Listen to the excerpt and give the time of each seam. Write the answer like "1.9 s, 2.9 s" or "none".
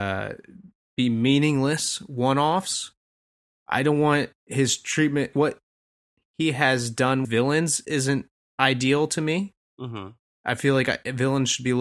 4.4 s, 5.3 s, 7.2 s